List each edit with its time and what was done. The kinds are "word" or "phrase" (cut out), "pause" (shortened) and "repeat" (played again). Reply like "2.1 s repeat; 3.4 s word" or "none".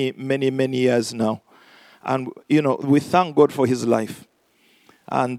none